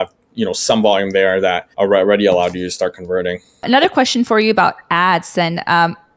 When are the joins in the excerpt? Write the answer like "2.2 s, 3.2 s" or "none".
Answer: 1.7 s